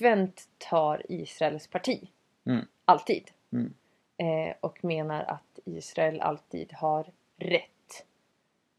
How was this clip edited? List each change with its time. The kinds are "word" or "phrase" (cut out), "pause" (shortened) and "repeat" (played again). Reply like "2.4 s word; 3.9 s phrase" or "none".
none